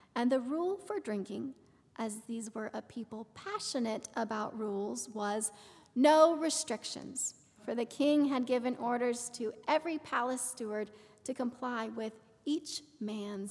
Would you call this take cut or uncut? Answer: uncut